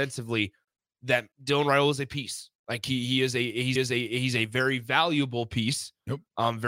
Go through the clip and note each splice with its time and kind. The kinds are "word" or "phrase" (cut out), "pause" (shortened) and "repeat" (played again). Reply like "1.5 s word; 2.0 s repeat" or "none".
1.3 s pause; 3.8 s repeat